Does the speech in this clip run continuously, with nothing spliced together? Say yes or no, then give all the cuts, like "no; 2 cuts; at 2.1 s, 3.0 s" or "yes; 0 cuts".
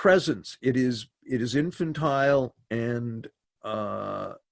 yes; 0 cuts